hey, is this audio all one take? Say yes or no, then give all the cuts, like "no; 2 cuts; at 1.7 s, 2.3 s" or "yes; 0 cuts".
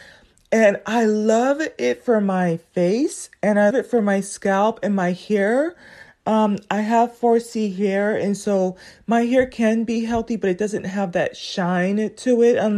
no; 1 cut; at 3.7 s